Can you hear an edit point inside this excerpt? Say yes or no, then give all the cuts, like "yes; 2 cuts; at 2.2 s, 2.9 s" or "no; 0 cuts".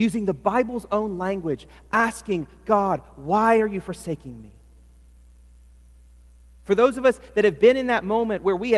no; 0 cuts